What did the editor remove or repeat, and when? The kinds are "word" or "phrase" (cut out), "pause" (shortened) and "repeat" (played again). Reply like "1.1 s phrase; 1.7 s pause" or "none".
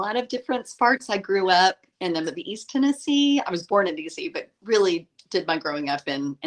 2.2 s word; 3.9 s phrase